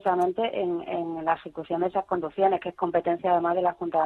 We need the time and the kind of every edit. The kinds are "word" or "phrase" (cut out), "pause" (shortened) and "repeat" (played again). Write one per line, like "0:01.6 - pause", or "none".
none